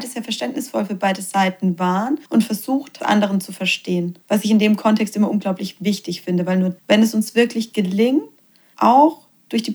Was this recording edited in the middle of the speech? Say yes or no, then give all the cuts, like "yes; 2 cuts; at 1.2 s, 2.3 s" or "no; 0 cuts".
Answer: yes; 4 cuts; at 2.3 s, 3.0 s, 4.2 s, 6.8 s